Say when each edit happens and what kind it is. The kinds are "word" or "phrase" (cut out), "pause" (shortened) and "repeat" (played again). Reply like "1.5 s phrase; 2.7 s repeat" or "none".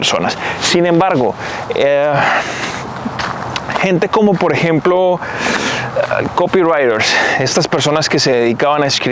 none